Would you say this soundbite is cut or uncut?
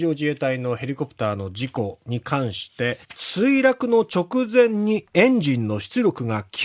cut